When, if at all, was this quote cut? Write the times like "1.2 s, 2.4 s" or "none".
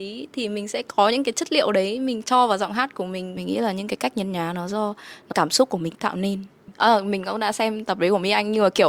5.3 s